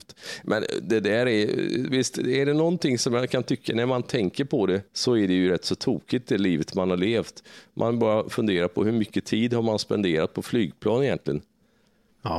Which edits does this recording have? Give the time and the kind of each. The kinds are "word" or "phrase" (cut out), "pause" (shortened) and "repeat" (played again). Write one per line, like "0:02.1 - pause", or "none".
0:04.9 - pause

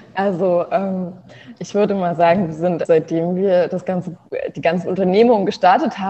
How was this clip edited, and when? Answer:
0:02.9 - word

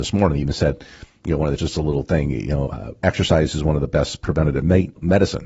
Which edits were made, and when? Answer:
0:01.6 - word
0:02.7 - word

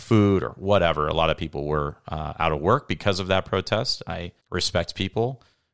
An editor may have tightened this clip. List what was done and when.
0:04.4 - pause

